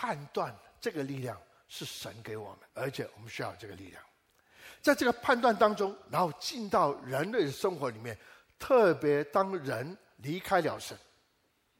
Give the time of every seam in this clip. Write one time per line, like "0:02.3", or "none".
0:02.7